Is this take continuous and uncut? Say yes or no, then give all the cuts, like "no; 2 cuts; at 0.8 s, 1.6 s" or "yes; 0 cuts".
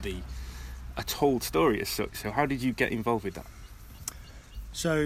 yes; 0 cuts